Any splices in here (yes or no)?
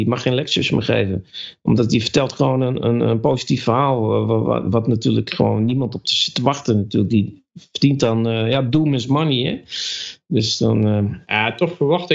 no